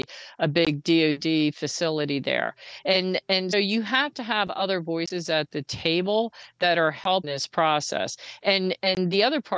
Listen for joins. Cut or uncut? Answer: cut